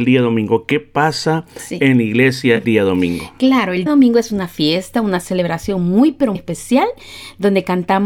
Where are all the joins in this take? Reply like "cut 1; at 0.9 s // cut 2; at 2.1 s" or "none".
cut 1; at 2.6 s // cut 2; at 3.9 s // cut 3; at 6.3 s

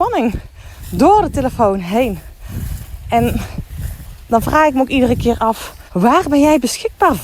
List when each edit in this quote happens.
cut 1; at 5.9 s

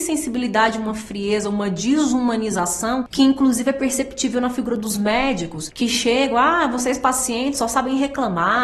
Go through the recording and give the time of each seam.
none

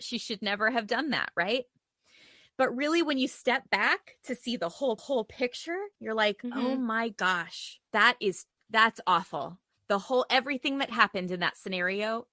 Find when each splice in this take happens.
cut 1; at 5.0 s // cut 2; at 7.9 s

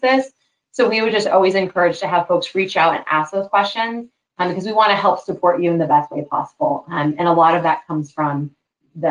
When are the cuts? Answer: none

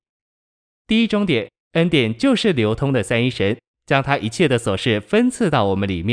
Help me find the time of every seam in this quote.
cut 1; at 1.6 s

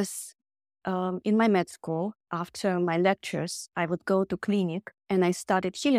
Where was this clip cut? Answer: cut 1; at 2.2 s // cut 2; at 5.0 s

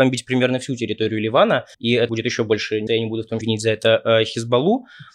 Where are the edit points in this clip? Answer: cut 1; at 1.7 s // cut 2; at 2.1 s // cut 3; at 2.9 s // cut 4; at 3.4 s

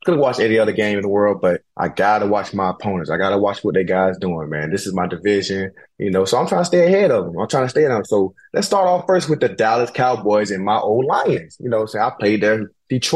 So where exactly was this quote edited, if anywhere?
cut 1; at 1.7 s // cut 2; at 5.9 s

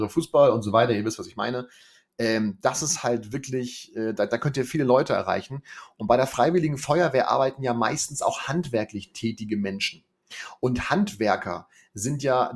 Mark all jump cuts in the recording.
none

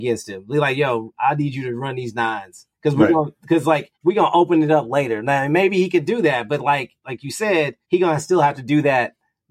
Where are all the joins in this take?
cut 1; at 2.7 s // cut 2; at 3.9 s // cut 3; at 7.8 s

